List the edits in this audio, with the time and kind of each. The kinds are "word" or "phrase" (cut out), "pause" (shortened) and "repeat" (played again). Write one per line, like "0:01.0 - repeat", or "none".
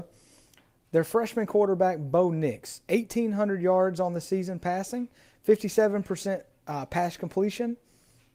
none